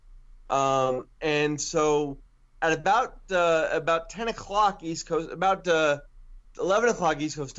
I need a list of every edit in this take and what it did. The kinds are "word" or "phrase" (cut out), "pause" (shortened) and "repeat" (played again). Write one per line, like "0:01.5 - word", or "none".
none